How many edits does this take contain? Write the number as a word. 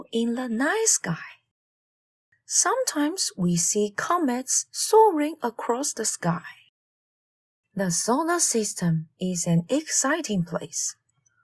zero